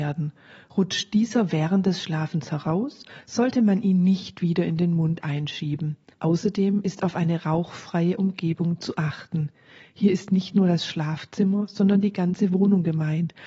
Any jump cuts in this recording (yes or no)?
yes